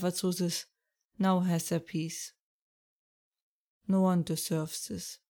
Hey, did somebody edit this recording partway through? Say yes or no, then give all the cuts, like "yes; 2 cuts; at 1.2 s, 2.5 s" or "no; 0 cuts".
no; 0 cuts